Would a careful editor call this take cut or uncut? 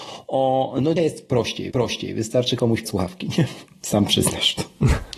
cut